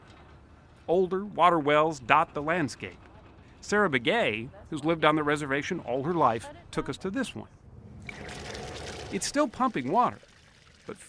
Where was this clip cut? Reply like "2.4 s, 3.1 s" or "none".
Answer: none